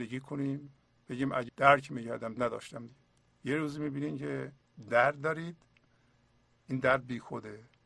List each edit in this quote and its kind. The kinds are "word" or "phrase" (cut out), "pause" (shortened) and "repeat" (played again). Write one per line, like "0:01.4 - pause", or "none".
0:01.5 - word
0:02.4 - phrase
0:03.2 - pause